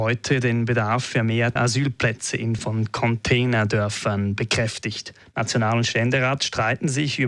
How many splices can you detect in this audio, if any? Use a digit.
2